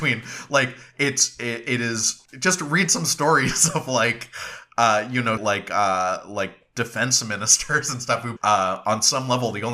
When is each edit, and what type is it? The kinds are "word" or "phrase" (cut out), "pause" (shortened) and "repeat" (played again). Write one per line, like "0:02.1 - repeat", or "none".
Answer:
0:02.3 - pause
0:05.4 - word
0:08.4 - word